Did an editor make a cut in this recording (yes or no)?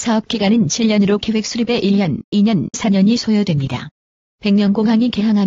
yes